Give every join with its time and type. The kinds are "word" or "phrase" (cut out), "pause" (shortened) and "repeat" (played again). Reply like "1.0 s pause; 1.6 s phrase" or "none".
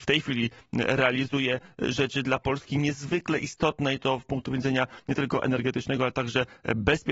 none

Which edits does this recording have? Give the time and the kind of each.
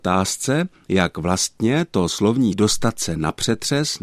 2.5 s word

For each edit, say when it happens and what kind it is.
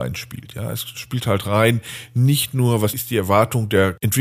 none

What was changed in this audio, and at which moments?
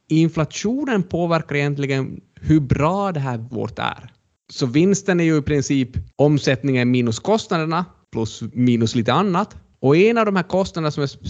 3.5 s word; 6.1 s pause

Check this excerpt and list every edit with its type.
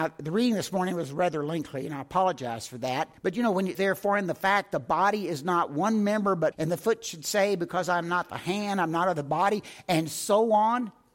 3.2 s pause; 3.7 s word; 6.5 s word

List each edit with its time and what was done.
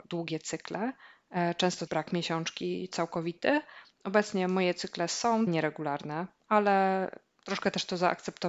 1.9 s word; 5.5 s word

